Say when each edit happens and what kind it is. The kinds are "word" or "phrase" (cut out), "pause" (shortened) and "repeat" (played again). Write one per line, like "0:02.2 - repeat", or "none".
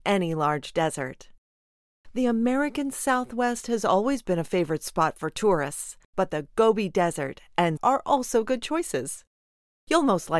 0:06.0 - pause
0:07.8 - phrase